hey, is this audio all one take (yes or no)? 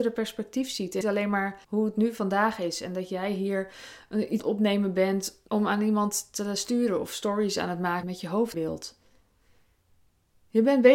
no